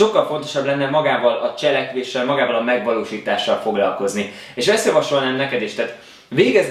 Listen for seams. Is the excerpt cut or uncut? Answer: uncut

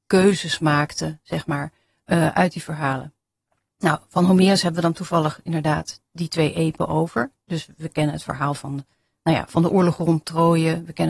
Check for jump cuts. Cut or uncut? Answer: uncut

